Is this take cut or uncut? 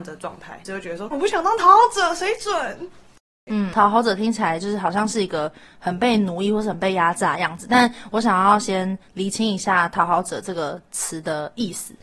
cut